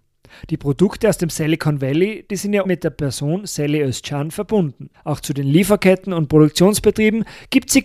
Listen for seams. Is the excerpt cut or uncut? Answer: cut